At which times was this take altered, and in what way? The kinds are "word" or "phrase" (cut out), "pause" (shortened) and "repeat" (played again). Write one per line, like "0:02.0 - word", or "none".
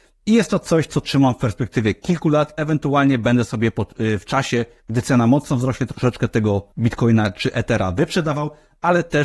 0:06.7 - pause